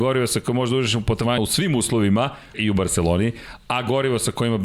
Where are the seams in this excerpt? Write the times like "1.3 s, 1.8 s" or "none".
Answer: 1.4 s, 2.5 s